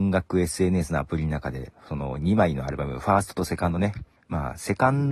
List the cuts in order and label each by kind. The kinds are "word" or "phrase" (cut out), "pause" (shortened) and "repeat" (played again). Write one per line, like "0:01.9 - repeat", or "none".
0:04.2 - pause

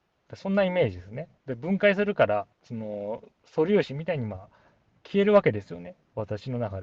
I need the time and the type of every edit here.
0:01.4 - pause
0:02.5 - pause
0:03.3 - pause

